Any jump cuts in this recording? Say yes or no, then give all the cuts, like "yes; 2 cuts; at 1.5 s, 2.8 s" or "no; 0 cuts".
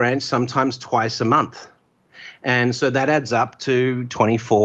no; 0 cuts